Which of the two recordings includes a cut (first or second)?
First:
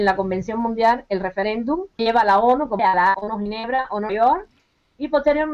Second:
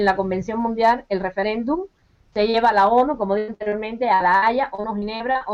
first